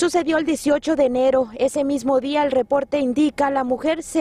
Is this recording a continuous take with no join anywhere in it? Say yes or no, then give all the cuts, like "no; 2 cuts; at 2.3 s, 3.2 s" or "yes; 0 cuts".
yes; 0 cuts